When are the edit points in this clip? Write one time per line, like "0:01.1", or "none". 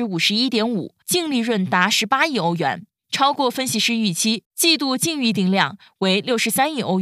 0:01.0
0:04.4